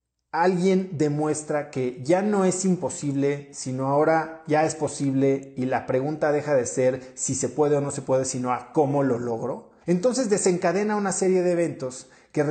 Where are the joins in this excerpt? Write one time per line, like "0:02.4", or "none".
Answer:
0:09.8